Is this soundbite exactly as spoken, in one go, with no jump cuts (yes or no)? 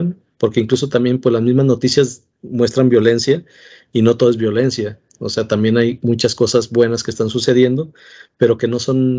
yes